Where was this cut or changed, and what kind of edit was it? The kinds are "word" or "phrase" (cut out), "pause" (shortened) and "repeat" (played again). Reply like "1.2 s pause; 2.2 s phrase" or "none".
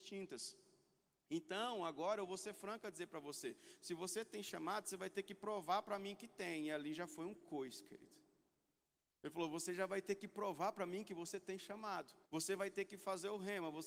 12.3 s pause